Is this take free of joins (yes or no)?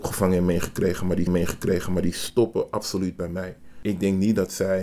no